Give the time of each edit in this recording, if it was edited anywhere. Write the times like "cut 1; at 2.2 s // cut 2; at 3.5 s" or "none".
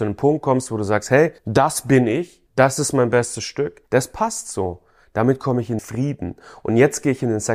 cut 1; at 1.4 s // cut 2; at 2.5 s // cut 3; at 3.9 s // cut 4; at 5.8 s